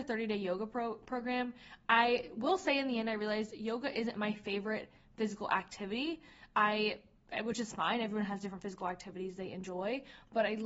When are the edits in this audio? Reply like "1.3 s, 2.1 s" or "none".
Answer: none